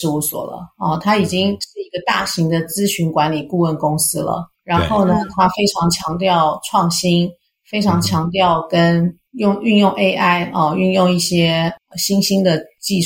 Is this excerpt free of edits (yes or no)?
yes